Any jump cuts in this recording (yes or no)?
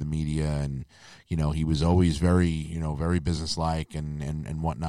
no